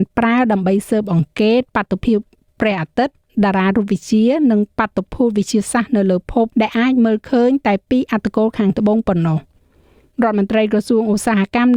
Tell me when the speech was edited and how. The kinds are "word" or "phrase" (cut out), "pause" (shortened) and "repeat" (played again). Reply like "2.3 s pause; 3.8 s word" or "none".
6.5 s pause